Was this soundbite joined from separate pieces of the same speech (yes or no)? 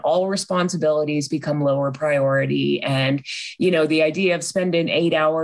no